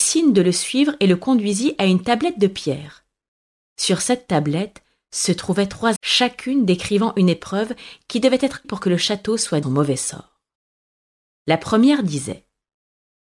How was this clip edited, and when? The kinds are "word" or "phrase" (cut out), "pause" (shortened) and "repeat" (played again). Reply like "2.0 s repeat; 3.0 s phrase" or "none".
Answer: 6.0 s word; 8.6 s word; 9.6 s phrase